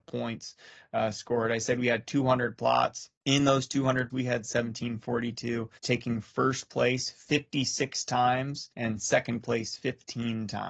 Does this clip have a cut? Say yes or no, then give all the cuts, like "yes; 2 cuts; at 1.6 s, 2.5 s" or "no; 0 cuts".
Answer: yes; 4 cuts; at 3.2 s, 4.1 s, 5.8 s, 8.7 s